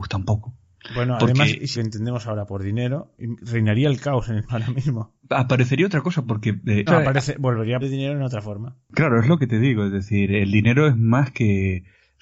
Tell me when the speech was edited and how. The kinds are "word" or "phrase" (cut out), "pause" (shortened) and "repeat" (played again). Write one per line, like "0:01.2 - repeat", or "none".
0:01.7 - phrase
0:03.4 - word
0:04.5 - word
0:06.9 - word
0:07.8 - word